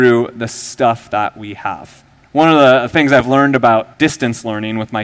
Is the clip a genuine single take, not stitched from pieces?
no; 2 cuts; at 2.2 s, 3.9 s

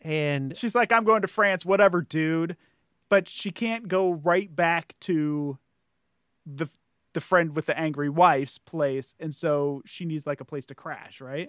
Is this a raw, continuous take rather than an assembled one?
yes; 0 cuts

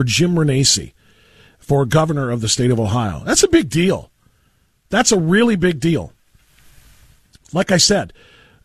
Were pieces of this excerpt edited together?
no; 0 cuts

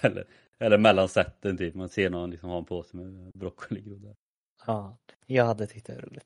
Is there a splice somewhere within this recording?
yes; 2 cuts; at 1.9 s, 5.1 s

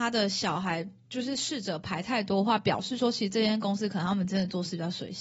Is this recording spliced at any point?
no; 0 cuts

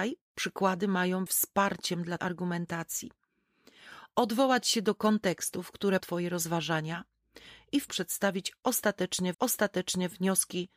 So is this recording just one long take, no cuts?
no; 5 cuts; at 1.3 s, 2.2 s, 6.0 s, 7.9 s, 9.3 s

